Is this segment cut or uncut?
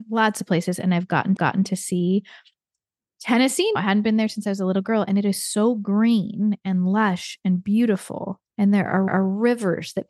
cut